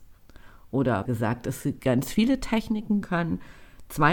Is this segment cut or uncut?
cut